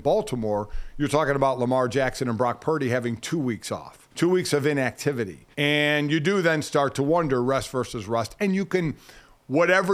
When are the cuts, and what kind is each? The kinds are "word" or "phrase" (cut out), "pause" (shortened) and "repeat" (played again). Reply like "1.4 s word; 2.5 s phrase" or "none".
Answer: 4.1 s pause; 5.5 s pause